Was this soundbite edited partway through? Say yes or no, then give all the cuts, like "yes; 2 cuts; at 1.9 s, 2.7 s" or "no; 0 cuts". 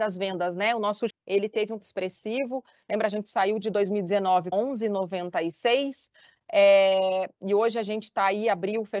yes; 4 cuts; at 1.1 s, 1.8 s, 3.6 s, 4.5 s